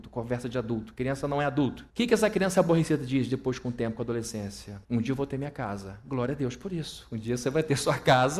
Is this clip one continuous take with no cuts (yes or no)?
no